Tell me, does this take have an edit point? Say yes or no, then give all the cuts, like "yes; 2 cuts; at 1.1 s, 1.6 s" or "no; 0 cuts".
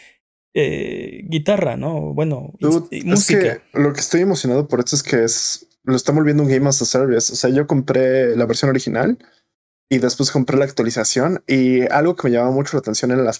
yes; 2 cuts; at 3.7 s, 5.8 s